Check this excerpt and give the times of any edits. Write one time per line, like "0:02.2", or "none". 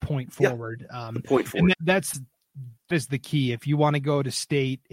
0:01.7
0:02.1
0:02.9